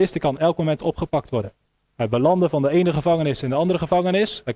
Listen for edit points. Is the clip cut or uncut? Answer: cut